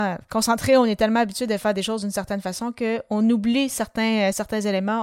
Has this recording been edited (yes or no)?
no